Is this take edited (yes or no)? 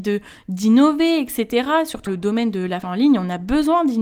yes